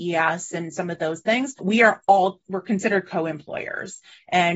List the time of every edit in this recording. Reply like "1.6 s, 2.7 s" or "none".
none